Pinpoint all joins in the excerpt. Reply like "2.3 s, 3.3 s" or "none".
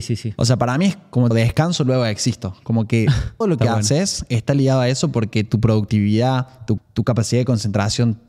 1.3 s, 3.4 s, 6.8 s

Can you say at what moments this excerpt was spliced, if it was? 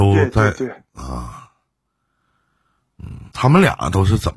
3.3 s

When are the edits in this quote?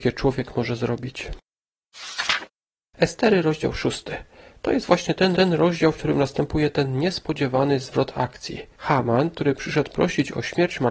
5.3 s, 8.7 s

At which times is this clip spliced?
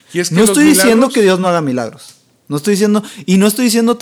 none

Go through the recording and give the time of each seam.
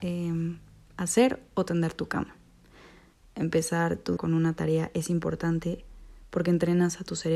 4.2 s

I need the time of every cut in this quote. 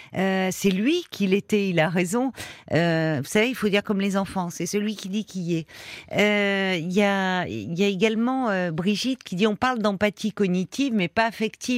none

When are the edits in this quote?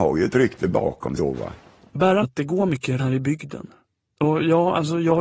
1.2 s, 2.2 s, 3.0 s

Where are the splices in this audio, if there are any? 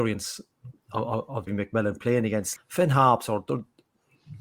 1.5 s, 2.6 s

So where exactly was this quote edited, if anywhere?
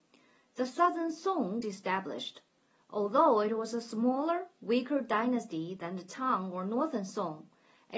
1.6 s

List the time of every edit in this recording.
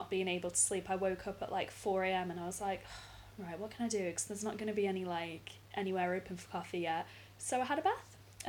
5.6 s

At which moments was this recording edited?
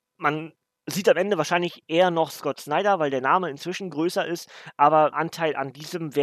5.1 s

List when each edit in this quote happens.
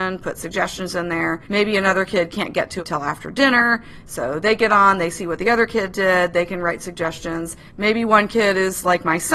1.4 s, 2.8 s, 7.7 s

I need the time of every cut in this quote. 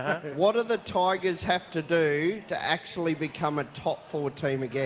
none

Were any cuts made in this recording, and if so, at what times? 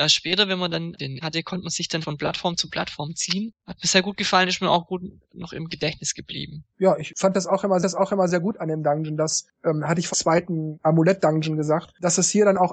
1.2 s, 2.0 s, 3.6 s, 6.7 s, 7.8 s, 10.1 s

